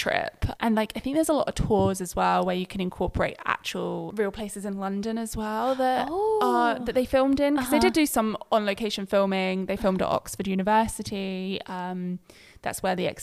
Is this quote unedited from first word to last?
yes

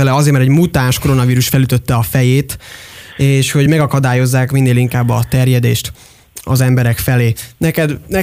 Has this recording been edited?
no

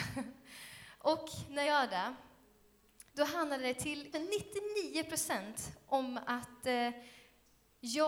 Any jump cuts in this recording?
yes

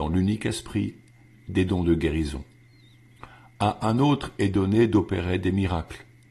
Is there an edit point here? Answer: no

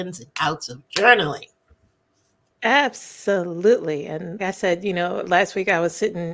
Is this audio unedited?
no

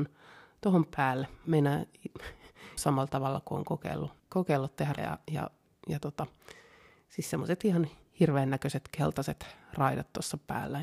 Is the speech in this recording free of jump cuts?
no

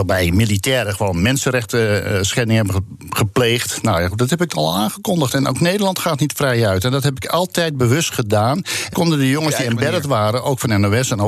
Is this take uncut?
no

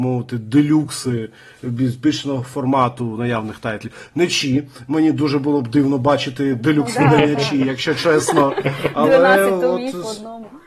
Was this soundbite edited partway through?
no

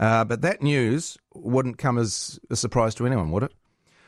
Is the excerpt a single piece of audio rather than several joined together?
yes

